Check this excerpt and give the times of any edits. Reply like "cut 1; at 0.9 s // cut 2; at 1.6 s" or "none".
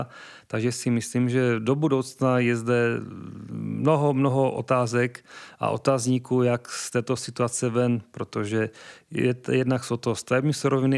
none